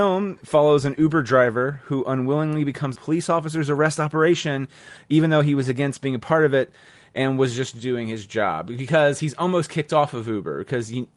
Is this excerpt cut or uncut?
cut